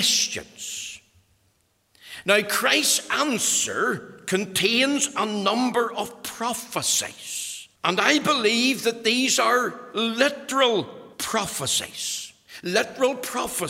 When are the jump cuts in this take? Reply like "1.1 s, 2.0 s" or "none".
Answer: 7.7 s, 11.1 s

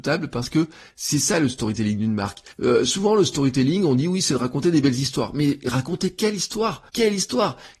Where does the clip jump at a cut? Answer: 2.5 s, 6.9 s

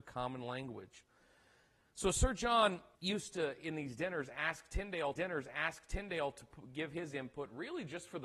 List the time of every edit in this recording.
2.9 s, 5.2 s

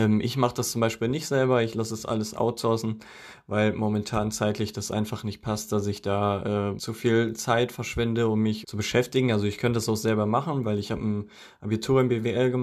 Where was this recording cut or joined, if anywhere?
6.8 s, 8.6 s

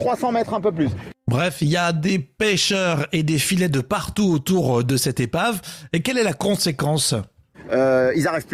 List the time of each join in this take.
none

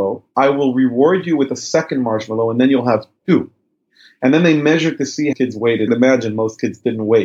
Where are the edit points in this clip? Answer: 5.3 s, 5.9 s

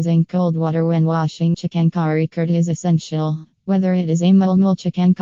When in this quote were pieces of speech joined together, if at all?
1.5 s, 3.6 s

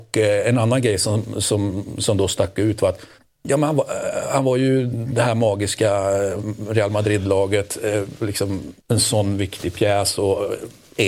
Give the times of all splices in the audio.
3.2 s, 8.8 s

